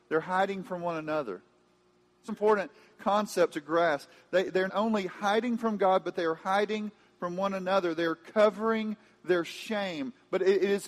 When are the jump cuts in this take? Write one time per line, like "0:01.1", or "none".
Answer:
0:02.3
0:04.7